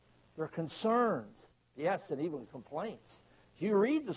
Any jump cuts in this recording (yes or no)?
no